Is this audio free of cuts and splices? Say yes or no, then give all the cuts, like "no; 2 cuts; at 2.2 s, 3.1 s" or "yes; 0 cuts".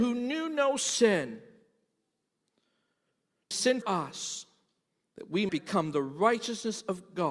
no; 3 cuts; at 3.5 s, 3.8 s, 5.5 s